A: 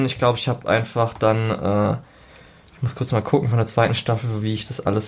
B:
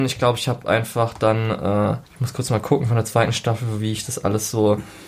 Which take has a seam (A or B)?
B